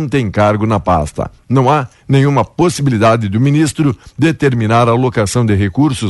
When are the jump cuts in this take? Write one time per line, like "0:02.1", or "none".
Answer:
none